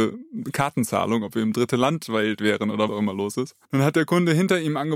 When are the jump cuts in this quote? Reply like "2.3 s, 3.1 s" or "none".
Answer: 2.9 s